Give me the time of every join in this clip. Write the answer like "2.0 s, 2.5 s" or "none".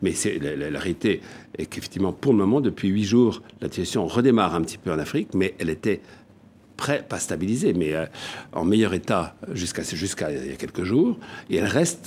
none